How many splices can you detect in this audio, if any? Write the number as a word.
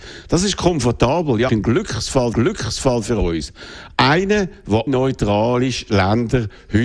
three